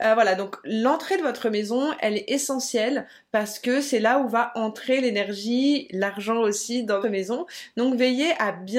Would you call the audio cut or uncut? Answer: cut